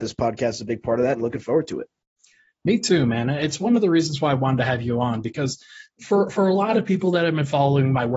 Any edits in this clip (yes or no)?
no